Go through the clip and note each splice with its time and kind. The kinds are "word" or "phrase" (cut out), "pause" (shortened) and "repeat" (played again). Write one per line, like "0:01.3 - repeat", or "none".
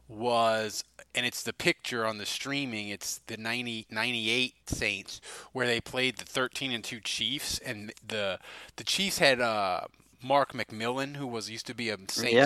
0:04.6 - pause